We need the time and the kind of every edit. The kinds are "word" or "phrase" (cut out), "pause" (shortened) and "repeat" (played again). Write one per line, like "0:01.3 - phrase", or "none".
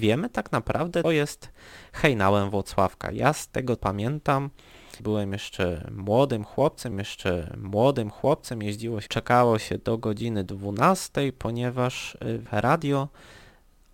0:01.0 - word
0:03.8 - word
0:05.0 - word
0:06.9 - repeat
0:09.1 - phrase
0:12.5 - phrase